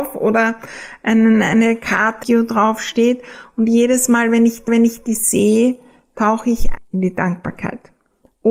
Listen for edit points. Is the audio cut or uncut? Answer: cut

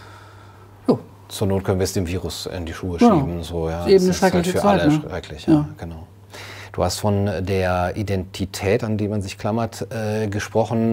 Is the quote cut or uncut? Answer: uncut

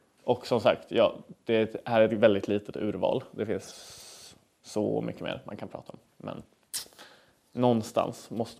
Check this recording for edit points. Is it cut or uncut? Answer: uncut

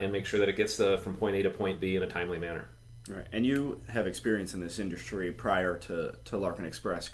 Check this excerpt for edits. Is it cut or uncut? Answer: uncut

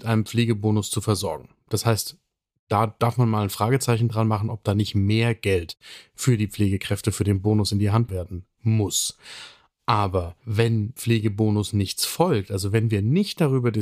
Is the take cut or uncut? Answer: cut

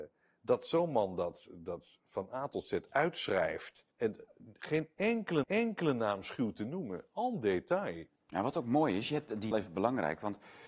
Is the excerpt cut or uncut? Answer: cut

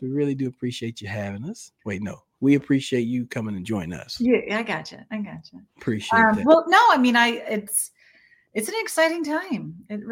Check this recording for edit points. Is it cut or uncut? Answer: cut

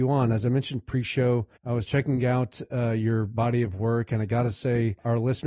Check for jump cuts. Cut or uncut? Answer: cut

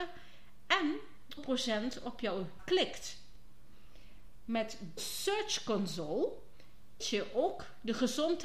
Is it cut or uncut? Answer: cut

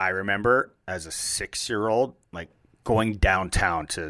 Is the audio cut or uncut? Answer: uncut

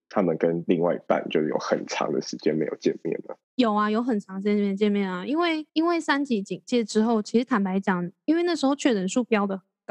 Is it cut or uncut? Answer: cut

